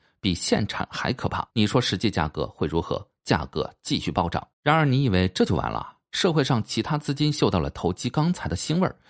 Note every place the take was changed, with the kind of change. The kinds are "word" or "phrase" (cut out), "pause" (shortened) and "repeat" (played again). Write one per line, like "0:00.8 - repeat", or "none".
0:01.5 - pause
0:04.5 - pause